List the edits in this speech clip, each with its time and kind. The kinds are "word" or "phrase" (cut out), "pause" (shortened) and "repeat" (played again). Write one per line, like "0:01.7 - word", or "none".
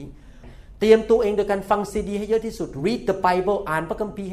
none